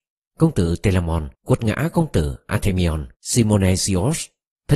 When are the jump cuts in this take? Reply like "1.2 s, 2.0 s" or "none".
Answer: 1.3 s, 3.1 s